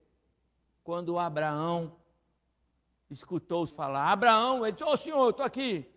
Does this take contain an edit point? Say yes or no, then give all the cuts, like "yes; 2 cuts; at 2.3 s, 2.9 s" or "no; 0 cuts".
yes; 1 cut; at 3.7 s